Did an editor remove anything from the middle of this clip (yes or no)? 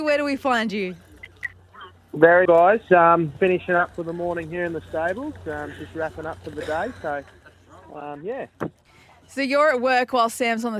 yes